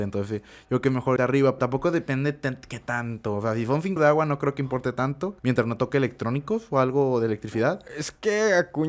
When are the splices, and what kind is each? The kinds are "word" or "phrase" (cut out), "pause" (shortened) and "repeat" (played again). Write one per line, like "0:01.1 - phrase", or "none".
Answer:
0:01.2 - word
0:01.6 - word
0:04.0 - word
0:05.4 - pause